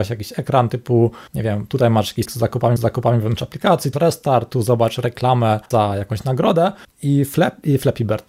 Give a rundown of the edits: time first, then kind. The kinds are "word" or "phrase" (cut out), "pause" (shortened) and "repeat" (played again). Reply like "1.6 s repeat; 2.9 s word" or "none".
1.3 s pause; 2.2 s word; 2.8 s repeat; 3.9 s word; 5.7 s pause; 6.8 s pause